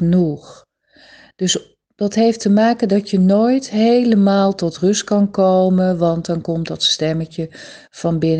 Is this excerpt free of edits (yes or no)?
yes